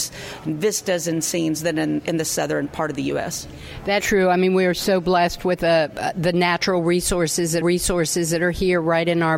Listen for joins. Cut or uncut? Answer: cut